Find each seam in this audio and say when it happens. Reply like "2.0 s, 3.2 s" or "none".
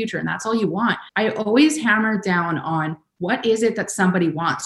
1.1 s